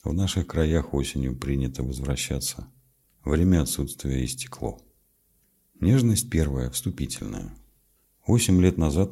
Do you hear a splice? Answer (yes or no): no